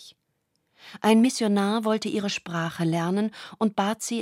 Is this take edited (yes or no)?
no